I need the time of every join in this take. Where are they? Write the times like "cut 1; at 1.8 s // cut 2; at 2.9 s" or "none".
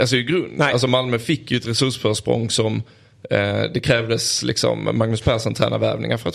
none